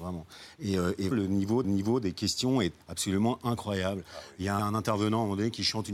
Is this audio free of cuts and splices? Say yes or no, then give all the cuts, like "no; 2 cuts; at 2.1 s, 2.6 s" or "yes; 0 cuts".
no; 4 cuts; at 1.1 s, 1.6 s, 2.8 s, 4.6 s